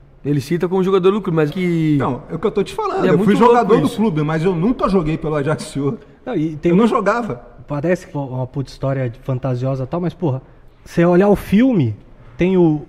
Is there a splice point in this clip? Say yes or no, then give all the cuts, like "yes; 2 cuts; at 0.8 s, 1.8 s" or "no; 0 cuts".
yes; 3 cuts; at 1.5 s, 8.1 s, 10.7 s